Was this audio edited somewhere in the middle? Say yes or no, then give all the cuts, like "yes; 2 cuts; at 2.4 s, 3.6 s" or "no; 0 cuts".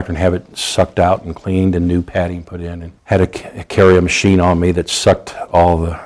yes; 1 cut; at 3.0 s